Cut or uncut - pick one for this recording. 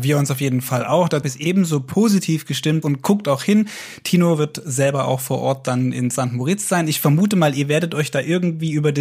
cut